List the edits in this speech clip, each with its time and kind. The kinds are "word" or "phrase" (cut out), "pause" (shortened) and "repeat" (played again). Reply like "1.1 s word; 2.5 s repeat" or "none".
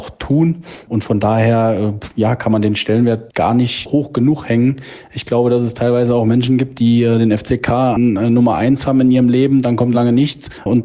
9.9 s word